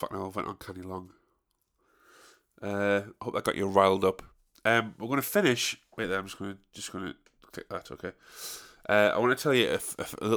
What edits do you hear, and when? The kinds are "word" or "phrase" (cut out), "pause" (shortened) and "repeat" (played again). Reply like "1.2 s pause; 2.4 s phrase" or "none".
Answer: none